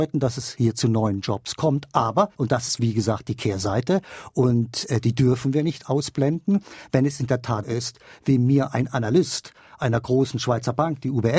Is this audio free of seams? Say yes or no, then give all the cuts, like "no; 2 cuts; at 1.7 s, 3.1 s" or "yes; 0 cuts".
no; 2 cuts; at 2.3 s, 7.6 s